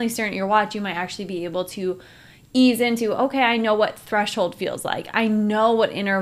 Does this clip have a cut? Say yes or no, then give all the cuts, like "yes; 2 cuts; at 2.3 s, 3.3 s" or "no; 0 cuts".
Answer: no; 0 cuts